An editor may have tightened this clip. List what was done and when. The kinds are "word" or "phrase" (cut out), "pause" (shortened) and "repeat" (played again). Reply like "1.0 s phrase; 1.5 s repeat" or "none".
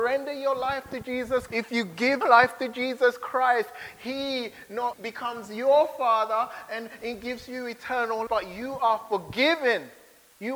1.5 s word; 2.2 s word; 4.9 s word; 8.3 s word